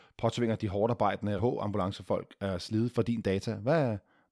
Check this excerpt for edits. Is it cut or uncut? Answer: cut